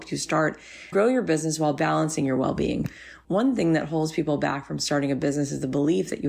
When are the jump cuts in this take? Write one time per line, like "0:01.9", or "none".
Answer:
0:00.9